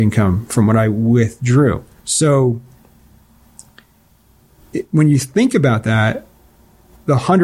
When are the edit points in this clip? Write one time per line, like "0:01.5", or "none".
0:02.0